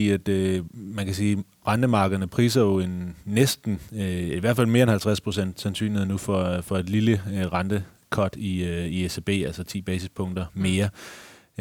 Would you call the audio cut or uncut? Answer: uncut